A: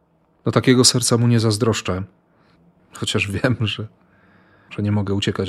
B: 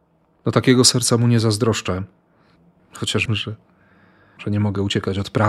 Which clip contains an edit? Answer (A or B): B